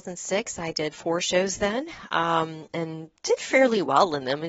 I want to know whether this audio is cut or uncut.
uncut